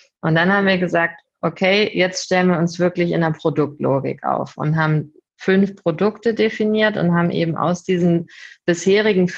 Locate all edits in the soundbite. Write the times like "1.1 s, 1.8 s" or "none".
none